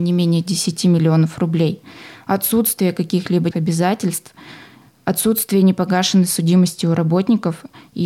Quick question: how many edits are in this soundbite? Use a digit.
1